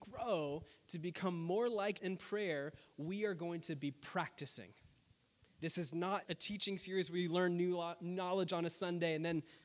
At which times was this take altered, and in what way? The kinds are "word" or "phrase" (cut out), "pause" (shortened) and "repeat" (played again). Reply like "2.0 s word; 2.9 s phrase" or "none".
2.0 s word; 6.2 s word